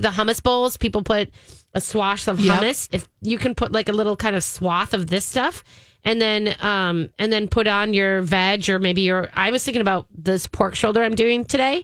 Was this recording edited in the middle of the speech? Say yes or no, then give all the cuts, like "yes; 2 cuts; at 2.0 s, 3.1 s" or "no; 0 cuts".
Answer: no; 0 cuts